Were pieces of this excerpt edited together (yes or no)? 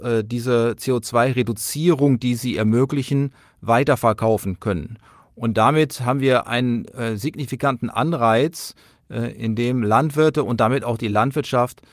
no